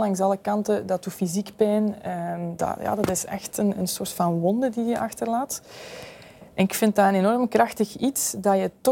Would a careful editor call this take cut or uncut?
uncut